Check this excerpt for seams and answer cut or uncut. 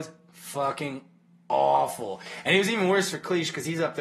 uncut